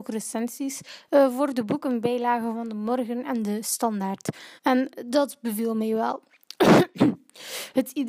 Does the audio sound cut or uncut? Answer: cut